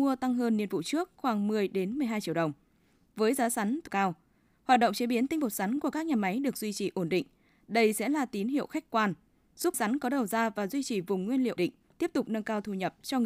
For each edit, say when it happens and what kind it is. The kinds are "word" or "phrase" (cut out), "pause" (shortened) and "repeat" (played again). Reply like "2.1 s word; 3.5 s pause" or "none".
3.9 s word; 9.7 s word; 11.6 s word